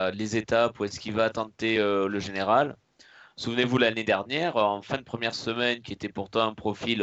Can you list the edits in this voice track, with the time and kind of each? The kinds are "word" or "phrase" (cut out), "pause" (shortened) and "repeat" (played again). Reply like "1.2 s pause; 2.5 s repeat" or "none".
none